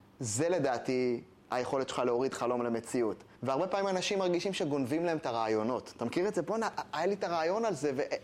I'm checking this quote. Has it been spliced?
yes; 1 cut; at 3.4 s

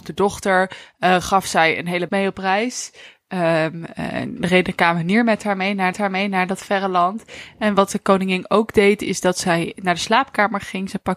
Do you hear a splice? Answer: yes; 3 cuts; at 2.1 s, 4.4 s, 5.9 s

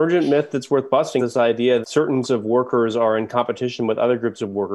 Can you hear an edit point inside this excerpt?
yes; 3 cuts; at 1.2 s, 1.8 s, 2.2 s

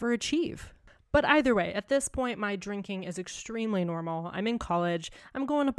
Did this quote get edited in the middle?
no; 0 cuts

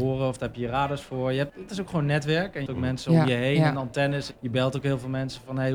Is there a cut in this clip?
yes; 3 cuts; at 1.5 s, 2.7 s, 4.3 s

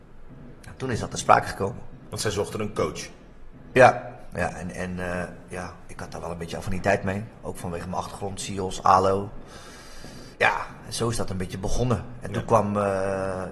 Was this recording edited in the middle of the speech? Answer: yes; 1 cut; at 10.3 s

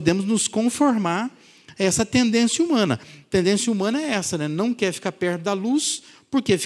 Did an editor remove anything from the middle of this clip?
no; 0 cuts

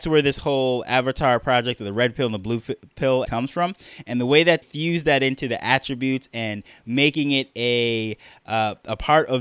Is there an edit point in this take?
yes; 2 cuts; at 3.2 s, 4.6 s

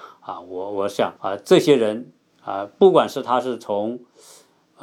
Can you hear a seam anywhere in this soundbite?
yes; 1 cut; at 1.2 s

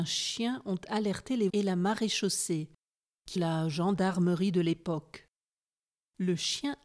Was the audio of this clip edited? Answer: yes; 2 cuts; at 1.5 s, 3.4 s

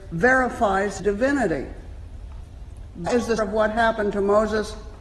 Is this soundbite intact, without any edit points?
no; 3 cuts; at 1.0 s, 3.1 s, 3.4 s

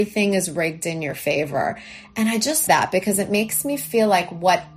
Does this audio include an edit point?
yes; 1 cut; at 2.7 s

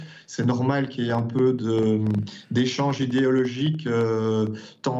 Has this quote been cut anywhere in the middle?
no; 0 cuts

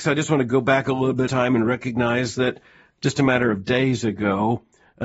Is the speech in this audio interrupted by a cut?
yes; 1 cut; at 1.3 s

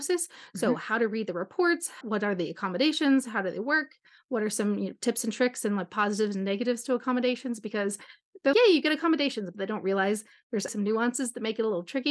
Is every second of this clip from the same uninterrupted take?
no; 3 cuts; at 2.0 s, 8.5 s, 10.7 s

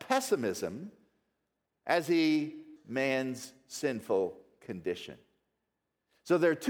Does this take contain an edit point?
yes; 1 cut; at 2.8 s

